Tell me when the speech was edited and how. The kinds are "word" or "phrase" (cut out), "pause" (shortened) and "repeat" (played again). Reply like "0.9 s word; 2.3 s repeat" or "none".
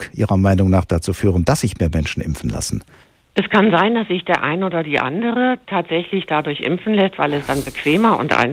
none